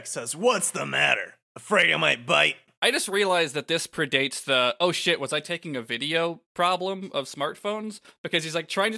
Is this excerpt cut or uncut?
uncut